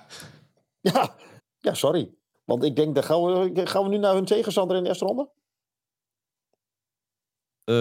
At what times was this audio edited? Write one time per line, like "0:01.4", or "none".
0:01.4
0:02.3